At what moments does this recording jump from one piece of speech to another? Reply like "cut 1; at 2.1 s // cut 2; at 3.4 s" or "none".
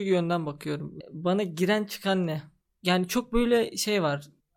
none